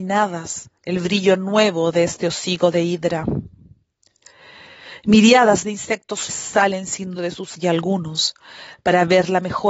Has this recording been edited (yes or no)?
yes